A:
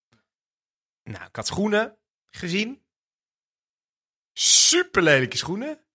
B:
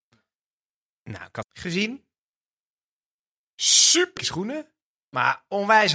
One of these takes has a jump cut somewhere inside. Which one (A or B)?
B